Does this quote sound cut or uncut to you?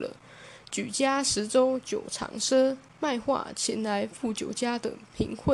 cut